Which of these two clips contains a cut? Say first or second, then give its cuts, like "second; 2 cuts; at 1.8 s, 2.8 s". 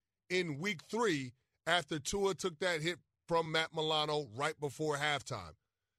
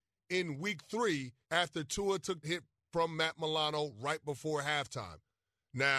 second; 2 cuts; at 1.4 s, 2.4 s